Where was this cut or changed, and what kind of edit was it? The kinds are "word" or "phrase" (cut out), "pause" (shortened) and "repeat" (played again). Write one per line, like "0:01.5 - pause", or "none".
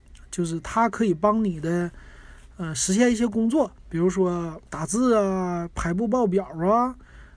0:04.7 - pause